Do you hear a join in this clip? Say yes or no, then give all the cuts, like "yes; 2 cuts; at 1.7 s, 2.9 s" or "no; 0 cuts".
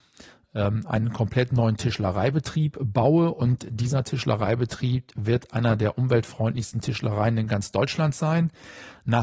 no; 0 cuts